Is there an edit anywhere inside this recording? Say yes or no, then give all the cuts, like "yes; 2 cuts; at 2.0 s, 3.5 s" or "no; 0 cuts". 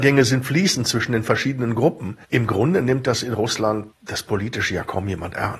yes; 2 cuts; at 2.2 s, 3.9 s